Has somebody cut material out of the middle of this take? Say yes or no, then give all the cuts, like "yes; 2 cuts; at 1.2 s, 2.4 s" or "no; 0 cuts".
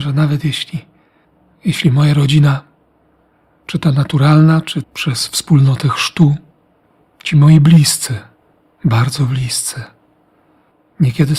yes; 1 cut; at 4.8 s